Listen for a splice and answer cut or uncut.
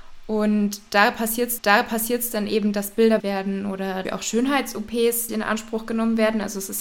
cut